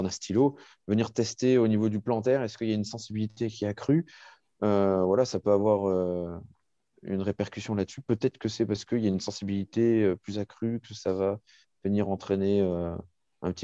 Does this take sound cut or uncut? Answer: uncut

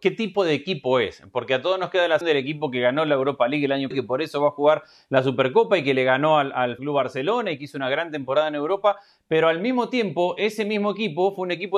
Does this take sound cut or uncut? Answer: cut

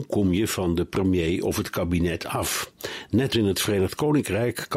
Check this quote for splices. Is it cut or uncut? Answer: cut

